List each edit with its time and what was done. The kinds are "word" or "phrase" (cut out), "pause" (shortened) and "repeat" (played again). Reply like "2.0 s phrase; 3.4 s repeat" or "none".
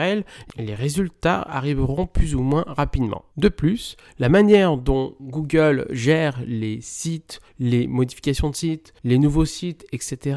3.3 s pause; 7.5 s pause; 9.0 s pause